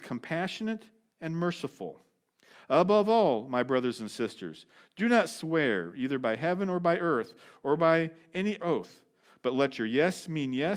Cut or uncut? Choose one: cut